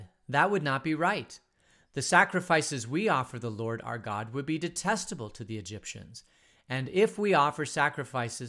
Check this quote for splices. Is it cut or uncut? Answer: uncut